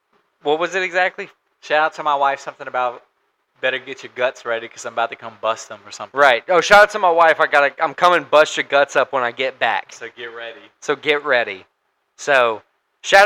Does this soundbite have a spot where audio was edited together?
no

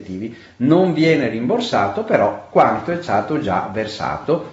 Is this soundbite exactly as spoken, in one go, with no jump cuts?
yes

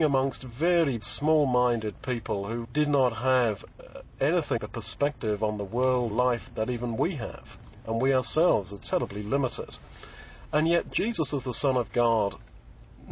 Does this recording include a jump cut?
yes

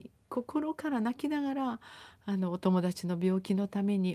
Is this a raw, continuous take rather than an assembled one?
yes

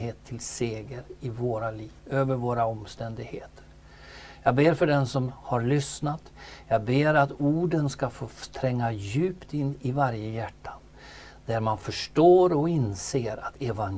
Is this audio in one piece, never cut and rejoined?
no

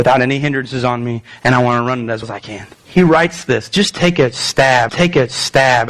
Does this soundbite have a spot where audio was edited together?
yes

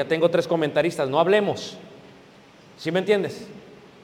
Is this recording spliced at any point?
no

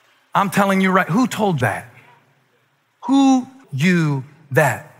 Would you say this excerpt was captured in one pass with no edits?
no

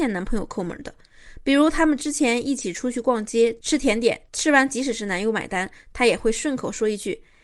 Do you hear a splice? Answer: no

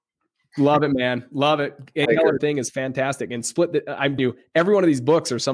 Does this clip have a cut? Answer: yes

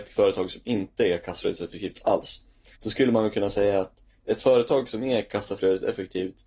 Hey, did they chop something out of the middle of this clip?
yes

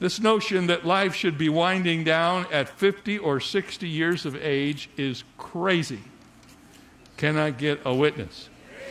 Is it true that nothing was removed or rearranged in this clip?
yes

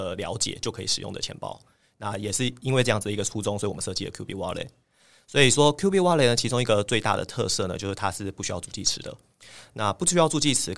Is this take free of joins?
yes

